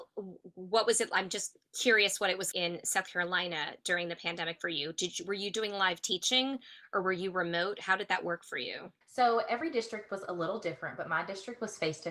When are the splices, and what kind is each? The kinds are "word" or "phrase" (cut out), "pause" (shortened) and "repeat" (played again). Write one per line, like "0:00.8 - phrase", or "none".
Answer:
0:02.5 - word
0:09.0 - pause